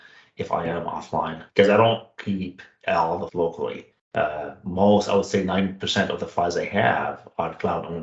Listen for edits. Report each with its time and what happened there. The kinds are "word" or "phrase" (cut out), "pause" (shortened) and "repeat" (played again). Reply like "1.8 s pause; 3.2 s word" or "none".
1.5 s pause; 3.3 s word; 3.9 s pause